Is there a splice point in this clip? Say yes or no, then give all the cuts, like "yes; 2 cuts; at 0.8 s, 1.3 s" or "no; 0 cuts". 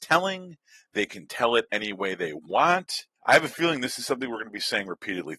yes; 1 cut; at 3.2 s